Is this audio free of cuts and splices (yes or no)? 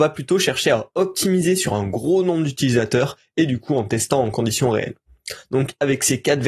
yes